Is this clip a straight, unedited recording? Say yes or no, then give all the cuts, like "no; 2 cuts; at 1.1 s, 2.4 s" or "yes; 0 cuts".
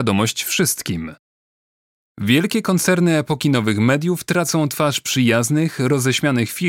yes; 0 cuts